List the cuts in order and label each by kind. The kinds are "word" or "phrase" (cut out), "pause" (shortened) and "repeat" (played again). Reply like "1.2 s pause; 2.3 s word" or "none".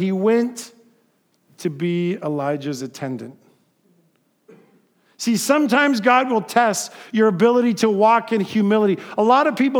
none